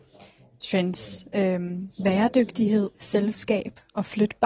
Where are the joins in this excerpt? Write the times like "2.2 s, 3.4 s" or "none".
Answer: 2.9 s